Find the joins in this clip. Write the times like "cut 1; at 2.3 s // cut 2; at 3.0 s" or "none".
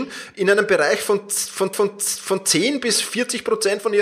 cut 1; at 1.7 s